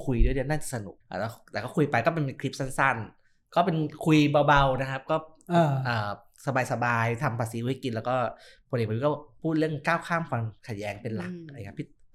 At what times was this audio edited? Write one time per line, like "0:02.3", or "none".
0:01.0